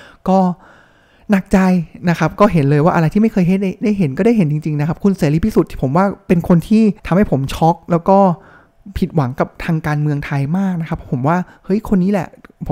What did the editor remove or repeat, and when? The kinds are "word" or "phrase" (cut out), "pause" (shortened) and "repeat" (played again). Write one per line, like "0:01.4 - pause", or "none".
0:07.0 - pause

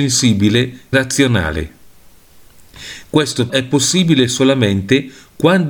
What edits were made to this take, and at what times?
0:00.9 - word
0:03.5 - word

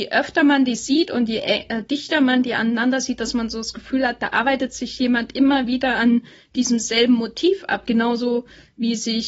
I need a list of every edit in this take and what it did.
none

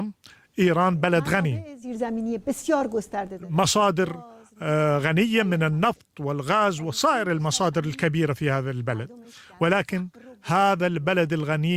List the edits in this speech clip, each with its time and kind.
none

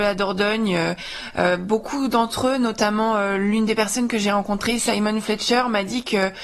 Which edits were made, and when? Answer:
none

